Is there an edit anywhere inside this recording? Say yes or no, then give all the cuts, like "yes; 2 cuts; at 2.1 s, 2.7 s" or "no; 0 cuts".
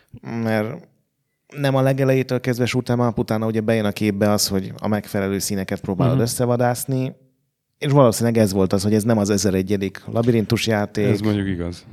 no; 0 cuts